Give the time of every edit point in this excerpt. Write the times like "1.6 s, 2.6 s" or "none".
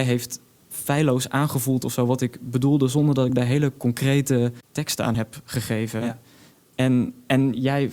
none